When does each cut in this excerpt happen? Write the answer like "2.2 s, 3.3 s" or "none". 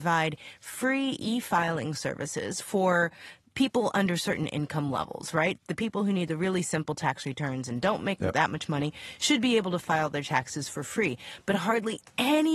none